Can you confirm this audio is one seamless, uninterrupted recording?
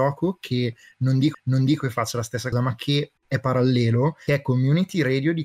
no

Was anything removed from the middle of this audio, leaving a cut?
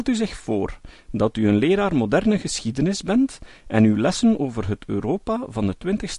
no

